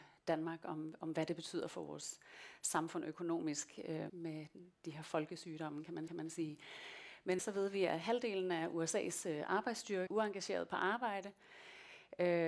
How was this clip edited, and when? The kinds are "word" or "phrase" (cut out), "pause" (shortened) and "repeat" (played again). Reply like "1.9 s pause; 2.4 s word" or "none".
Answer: 4.1 s word; 6.1 s repeat; 7.4 s phrase; 10.1 s word